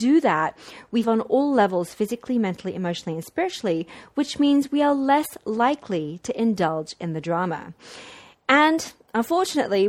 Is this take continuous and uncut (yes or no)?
no